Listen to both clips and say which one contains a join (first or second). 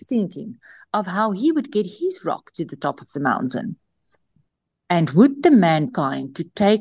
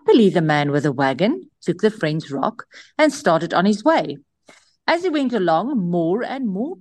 first